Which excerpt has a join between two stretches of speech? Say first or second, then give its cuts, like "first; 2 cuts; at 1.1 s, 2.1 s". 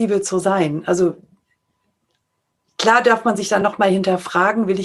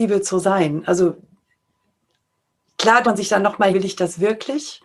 second; 2 cuts; at 3.0 s, 3.7 s